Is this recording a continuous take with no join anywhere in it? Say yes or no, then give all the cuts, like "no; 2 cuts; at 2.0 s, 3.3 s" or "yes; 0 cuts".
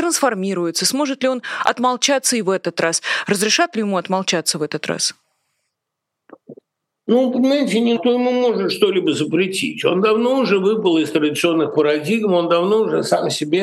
no; 1 cut; at 8.0 s